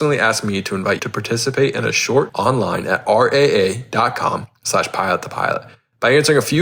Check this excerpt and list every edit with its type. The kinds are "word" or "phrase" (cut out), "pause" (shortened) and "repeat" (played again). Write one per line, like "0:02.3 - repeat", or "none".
0:01.0 - word
0:02.3 - word